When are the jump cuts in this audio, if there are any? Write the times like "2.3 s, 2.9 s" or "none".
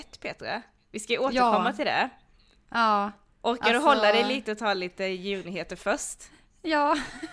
none